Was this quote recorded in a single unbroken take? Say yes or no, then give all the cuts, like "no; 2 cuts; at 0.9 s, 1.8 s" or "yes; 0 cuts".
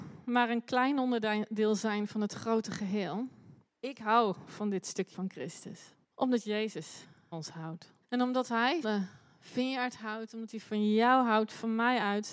no; 6 cuts; at 3.6 s, 5.1 s, 6.0 s, 7.3 s, 8.0 s, 8.8 s